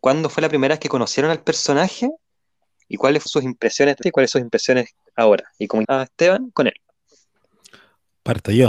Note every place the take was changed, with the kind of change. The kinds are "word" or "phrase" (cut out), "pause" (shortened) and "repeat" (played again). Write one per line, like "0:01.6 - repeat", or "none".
0:03.3 - word
0:04.0 - word
0:04.3 - word
0:05.8 - word
0:06.5 - word